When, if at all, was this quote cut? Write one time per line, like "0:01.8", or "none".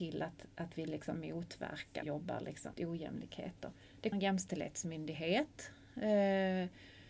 0:02.0
0:02.7
0:04.1